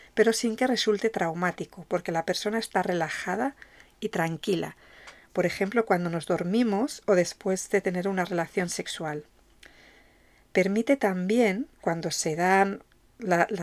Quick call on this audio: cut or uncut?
cut